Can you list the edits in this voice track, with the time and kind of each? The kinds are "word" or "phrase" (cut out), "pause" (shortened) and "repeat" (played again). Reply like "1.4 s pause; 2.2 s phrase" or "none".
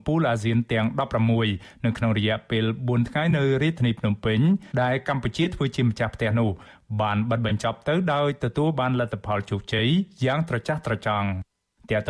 4.7 s pause